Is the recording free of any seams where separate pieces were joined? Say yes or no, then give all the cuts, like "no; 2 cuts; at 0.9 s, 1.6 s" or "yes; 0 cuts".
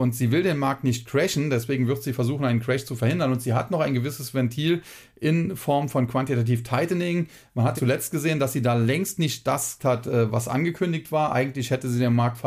no; 2 cuts; at 7.8 s, 9.8 s